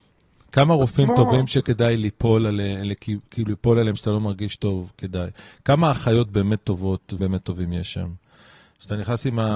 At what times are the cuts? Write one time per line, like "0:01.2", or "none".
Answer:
0:07.2